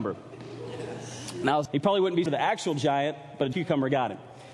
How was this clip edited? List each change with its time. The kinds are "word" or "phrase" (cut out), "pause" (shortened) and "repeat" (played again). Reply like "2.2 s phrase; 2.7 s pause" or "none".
1.7 s word; 2.3 s word; 3.5 s word